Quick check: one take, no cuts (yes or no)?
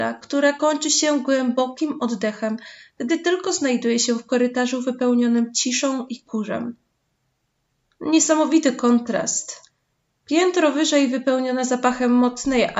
yes